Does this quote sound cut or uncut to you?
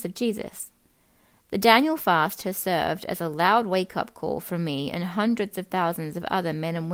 uncut